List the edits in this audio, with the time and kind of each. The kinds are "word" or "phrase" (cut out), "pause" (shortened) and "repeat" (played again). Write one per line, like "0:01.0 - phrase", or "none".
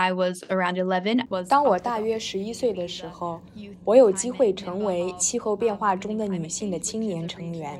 0:01.3 - word